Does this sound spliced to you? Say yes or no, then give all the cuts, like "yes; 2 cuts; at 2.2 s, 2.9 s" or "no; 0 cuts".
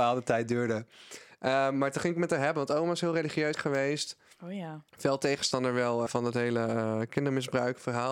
yes; 3 cuts; at 3.5 s, 4.9 s, 6.1 s